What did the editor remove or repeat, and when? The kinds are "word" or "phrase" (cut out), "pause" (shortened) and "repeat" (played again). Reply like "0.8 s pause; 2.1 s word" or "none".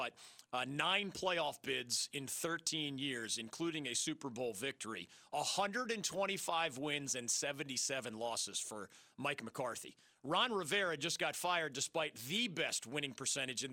none